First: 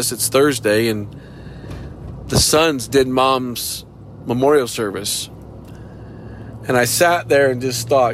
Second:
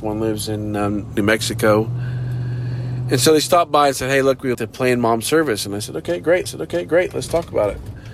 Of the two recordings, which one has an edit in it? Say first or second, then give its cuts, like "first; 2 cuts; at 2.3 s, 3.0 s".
second; 2 cuts; at 4.5 s, 6.5 s